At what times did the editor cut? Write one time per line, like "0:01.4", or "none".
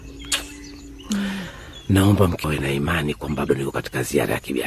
0:02.4
0:03.5